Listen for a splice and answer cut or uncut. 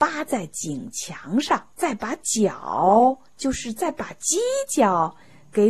cut